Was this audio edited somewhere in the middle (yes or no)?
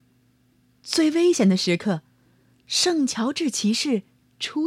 no